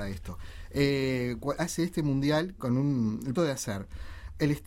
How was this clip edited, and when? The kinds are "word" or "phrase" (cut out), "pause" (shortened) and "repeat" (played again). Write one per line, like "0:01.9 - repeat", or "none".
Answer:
0:01.6 - word
0:02.6 - word
0:03.3 - word

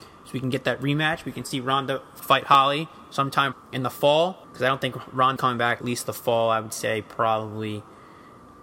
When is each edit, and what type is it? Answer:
0:02.2 - word
0:03.5 - word
0:04.4 - pause
0:05.4 - phrase
0:05.8 - phrase

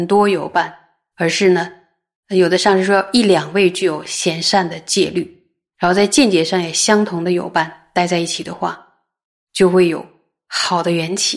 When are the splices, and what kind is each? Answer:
none

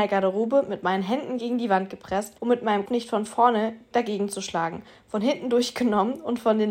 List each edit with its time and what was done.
0:02.4 - pause
0:02.9 - word
0:03.9 - word

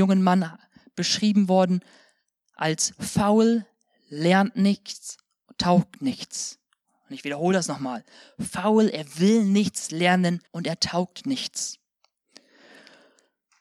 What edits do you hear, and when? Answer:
0:10.5 - pause

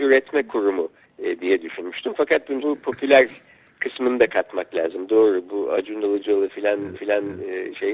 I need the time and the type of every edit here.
0:01.0 - pause
0:02.6 - word
0:06.9 - repeat

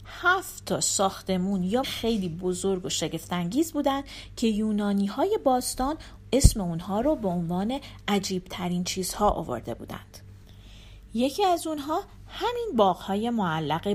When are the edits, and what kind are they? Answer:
0:01.8 - word

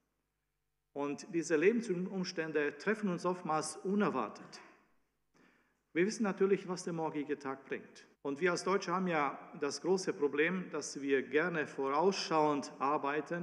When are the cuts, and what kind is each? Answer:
0:06.6 - word
0:08.1 - pause

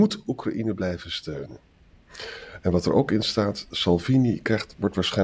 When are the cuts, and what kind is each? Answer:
none

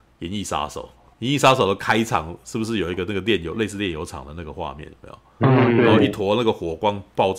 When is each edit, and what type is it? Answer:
0:01.1 - pause

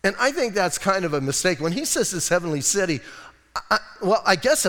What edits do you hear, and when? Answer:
none

